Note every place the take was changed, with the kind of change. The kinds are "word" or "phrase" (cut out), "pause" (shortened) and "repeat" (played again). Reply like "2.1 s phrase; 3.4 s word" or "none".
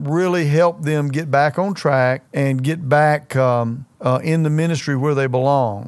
2.3 s pause; 3.9 s pause